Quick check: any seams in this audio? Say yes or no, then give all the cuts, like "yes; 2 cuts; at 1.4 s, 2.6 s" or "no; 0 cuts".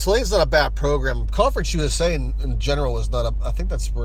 no; 0 cuts